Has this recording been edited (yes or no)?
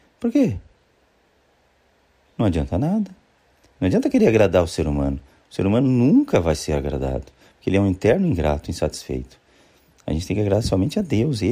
no